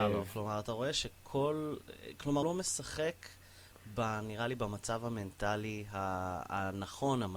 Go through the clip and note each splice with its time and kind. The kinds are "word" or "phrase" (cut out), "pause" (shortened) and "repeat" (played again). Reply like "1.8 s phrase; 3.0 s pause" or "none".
2.4 s word